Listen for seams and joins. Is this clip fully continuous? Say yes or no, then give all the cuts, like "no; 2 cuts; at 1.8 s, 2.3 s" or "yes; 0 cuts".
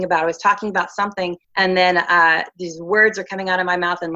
no; 1 cut; at 1.4 s